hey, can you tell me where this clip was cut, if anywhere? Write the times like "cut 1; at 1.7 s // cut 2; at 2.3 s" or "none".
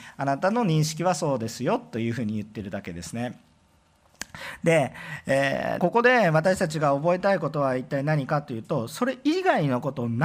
cut 1; at 5.8 s